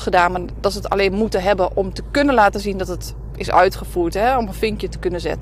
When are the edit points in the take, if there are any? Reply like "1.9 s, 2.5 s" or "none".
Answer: none